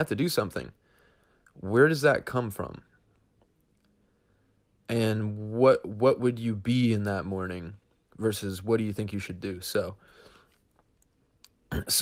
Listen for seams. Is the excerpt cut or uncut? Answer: uncut